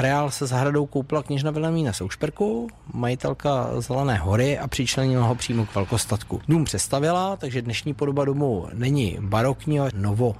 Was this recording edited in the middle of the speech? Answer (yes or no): no